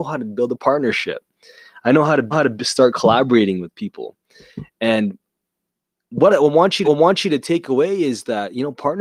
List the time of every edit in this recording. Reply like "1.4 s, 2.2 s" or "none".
2.3 s, 6.3 s, 6.8 s